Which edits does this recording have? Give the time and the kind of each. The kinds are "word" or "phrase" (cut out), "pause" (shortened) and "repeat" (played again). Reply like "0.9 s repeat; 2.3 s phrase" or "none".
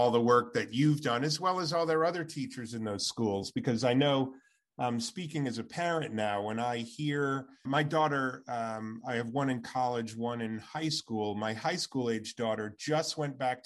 7.7 s word